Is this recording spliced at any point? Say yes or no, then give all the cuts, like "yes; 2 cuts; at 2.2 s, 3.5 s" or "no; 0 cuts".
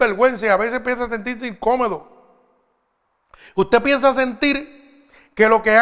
no; 0 cuts